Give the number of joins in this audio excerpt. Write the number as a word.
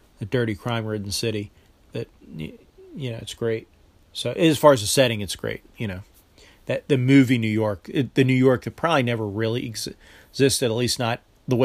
zero